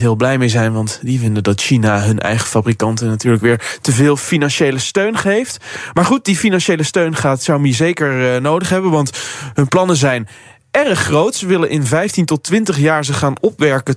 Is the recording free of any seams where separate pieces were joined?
yes; 0 cuts

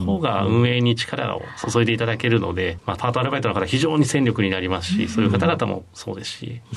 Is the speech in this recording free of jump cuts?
no; 1 cut; at 2.8 s

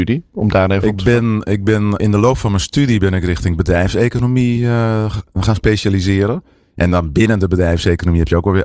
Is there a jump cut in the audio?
no; 0 cuts

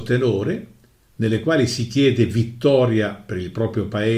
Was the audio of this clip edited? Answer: no; 0 cuts

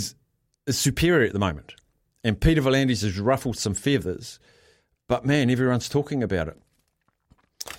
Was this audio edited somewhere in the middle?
no; 0 cuts

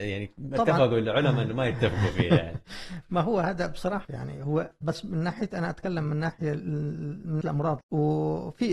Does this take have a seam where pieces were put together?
yes; 3 cuts; at 4.0 s, 7.4 s, 7.8 s

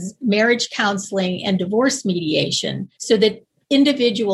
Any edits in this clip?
yes; 1 cut; at 2.9 s

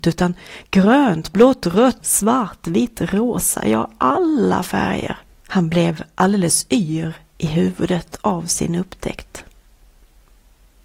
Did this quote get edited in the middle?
yes; 2 cuts; at 2.0 s, 5.3 s

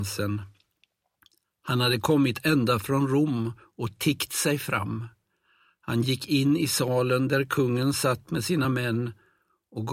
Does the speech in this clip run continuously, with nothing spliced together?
yes; 0 cuts

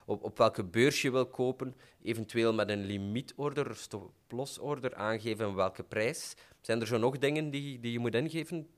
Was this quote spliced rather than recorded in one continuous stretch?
no; 0 cuts

